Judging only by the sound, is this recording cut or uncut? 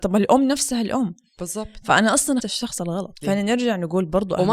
cut